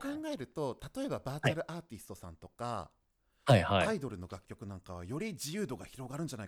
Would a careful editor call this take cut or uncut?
uncut